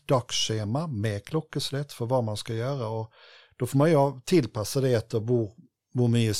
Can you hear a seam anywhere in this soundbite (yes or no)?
no